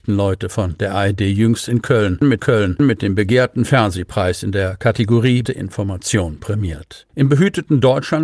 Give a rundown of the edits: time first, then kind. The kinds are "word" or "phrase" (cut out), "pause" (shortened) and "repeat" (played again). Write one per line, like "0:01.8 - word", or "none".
0:02.4 - repeat
0:05.5 - word
0:07.1 - pause